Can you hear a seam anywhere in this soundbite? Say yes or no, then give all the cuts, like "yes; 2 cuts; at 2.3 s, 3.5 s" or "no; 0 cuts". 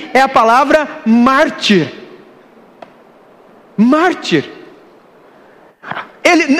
no; 0 cuts